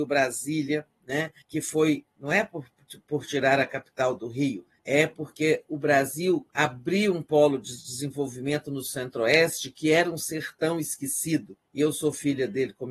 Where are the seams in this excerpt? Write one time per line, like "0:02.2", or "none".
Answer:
0:01.4
0:04.8
0:06.5
0:11.6